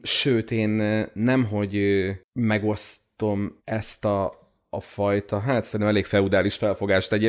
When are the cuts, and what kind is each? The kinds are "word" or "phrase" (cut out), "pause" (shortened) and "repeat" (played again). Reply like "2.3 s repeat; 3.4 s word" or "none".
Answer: 3.6 s pause